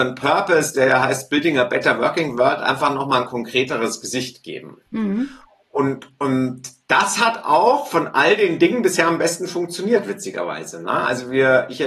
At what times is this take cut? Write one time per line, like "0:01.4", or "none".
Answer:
none